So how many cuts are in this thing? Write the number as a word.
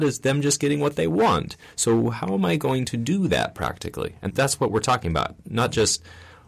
one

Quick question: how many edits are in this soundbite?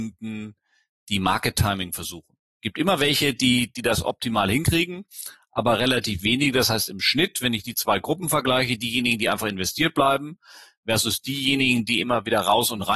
zero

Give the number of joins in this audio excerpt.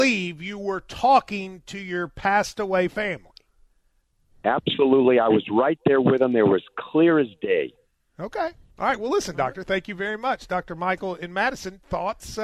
zero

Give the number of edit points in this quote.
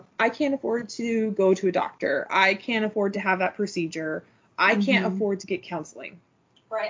zero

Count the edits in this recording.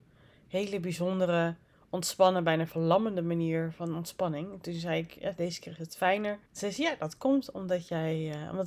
one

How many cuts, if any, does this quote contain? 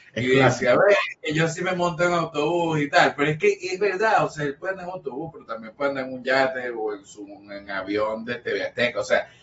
zero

